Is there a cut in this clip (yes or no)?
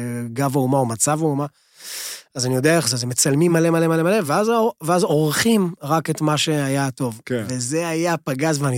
no